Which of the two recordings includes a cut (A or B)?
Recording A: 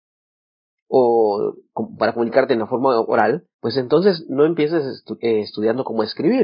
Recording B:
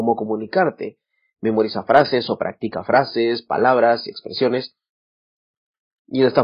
A